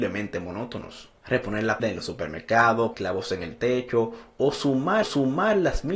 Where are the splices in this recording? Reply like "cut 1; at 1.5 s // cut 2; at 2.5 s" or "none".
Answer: cut 1; at 1.8 s // cut 2; at 2.9 s // cut 3; at 5.0 s